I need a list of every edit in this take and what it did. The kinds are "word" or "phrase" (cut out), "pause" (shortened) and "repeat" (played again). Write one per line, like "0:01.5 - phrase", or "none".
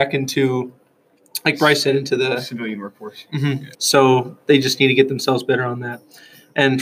0:03.7 - pause